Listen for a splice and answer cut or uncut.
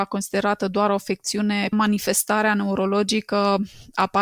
cut